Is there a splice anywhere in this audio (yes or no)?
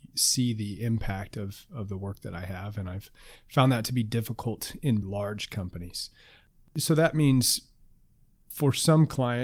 yes